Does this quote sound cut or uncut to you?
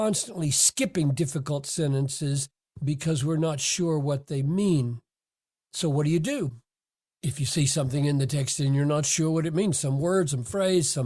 uncut